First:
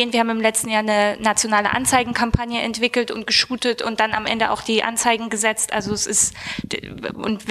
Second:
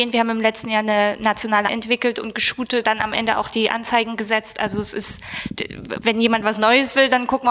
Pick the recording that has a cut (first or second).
second